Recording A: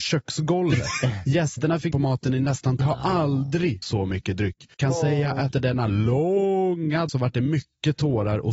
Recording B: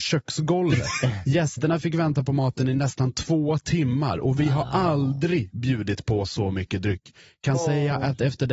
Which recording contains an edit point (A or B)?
A